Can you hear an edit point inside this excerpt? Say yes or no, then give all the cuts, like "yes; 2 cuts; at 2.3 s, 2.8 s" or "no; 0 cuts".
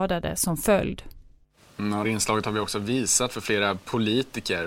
yes; 2 cuts; at 1.6 s, 2.0 s